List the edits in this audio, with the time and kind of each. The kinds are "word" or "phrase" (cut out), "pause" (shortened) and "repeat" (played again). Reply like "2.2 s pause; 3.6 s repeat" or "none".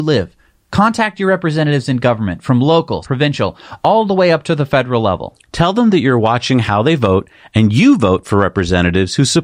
3.0 s word